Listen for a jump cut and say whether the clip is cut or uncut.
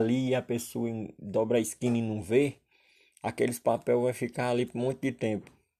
uncut